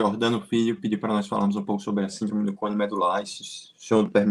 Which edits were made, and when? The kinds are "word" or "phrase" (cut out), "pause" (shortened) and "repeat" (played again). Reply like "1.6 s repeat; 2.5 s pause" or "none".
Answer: none